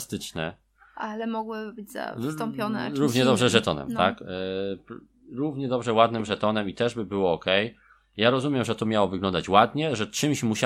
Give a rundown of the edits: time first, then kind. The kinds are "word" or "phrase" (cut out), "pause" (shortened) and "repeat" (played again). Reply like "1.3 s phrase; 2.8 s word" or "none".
none